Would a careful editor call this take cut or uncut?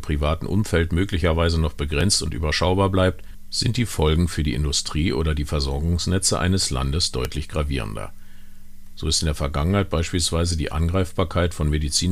uncut